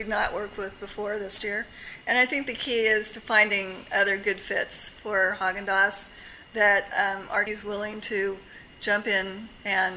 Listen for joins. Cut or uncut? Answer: cut